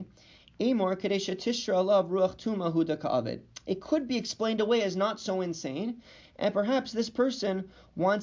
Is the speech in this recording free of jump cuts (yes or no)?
yes